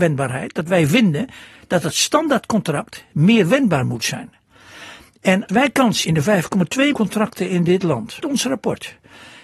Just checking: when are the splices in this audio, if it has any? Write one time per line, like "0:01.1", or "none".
0:05.5
0:06.0
0:06.9
0:08.2